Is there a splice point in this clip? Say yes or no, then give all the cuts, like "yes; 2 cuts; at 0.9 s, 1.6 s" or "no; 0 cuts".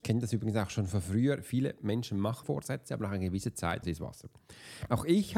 yes; 2 cuts; at 2.4 s, 3.8 s